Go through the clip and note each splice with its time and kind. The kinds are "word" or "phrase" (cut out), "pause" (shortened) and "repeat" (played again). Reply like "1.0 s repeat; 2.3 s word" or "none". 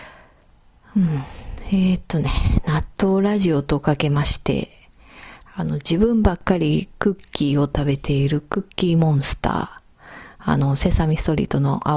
2.9 s pause